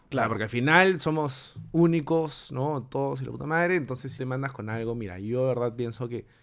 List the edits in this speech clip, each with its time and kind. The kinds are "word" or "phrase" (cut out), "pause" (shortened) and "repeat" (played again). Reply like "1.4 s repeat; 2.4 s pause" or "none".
4.2 s phrase